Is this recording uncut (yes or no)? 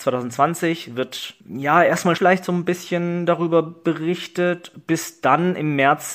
no